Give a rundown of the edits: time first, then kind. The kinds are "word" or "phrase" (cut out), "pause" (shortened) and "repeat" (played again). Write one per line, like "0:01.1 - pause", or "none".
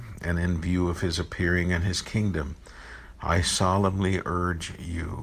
none